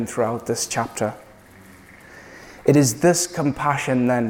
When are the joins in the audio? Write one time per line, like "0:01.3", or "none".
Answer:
none